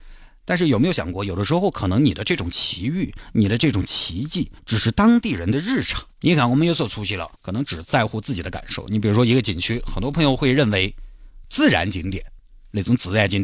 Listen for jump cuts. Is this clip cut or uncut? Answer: cut